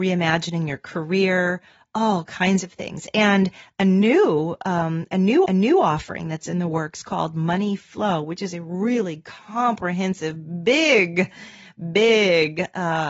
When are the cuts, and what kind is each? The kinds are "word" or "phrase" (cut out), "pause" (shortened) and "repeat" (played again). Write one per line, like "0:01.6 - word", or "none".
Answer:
0:05.5 - repeat

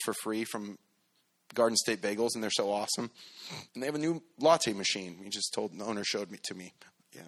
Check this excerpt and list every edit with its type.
0:03.7 - pause

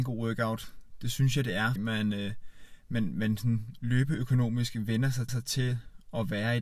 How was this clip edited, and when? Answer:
0:01.8 - word
0:05.3 - repeat

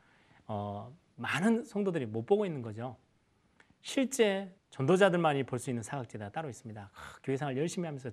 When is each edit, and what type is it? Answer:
0:04.6 - pause

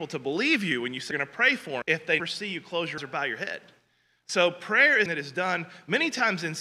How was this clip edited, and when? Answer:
0:01.1 - word
0:01.8 - word
0:02.2 - word
0:03.0 - word
0:05.1 - word

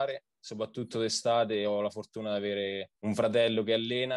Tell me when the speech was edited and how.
0:02.9 - pause

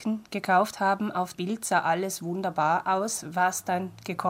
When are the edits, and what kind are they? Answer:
0:01.3 - word

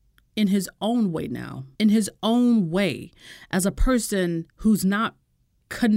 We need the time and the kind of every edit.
0:01.7 - pause
0:04.5 - pause

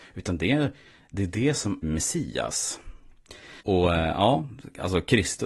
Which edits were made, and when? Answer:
0:01.8 - word
0:03.6 - pause

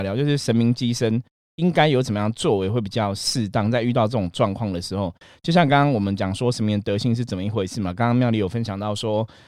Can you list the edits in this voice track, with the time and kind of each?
none

